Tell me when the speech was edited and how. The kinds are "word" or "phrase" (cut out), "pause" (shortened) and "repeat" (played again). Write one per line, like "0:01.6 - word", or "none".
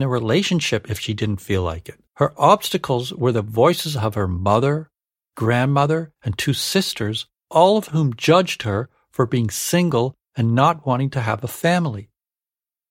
0:02.1 - pause
0:06.2 - pause